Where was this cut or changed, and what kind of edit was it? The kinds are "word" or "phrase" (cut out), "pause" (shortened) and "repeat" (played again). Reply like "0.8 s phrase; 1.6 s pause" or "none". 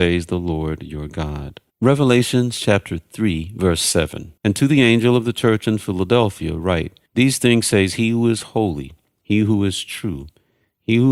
1.7 s pause; 4.4 s pause; 7.1 s pause